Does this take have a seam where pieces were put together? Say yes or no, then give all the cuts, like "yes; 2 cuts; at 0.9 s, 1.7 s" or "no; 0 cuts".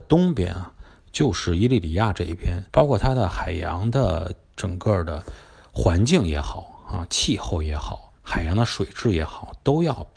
yes; 2 cuts; at 2.7 s, 8.1 s